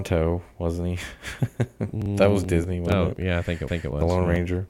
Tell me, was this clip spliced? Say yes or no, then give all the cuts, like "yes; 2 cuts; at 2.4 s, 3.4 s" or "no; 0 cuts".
yes; 1 cut; at 3.7 s